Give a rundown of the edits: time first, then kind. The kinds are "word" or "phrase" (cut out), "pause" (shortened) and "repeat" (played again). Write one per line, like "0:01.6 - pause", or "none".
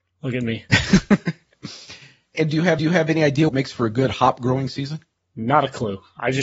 0:02.3 - word
0:02.8 - repeat
0:03.5 - word